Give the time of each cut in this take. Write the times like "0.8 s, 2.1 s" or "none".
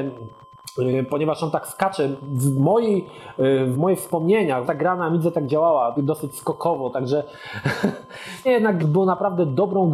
3.7 s, 4.6 s, 6.0 s, 8.4 s, 8.8 s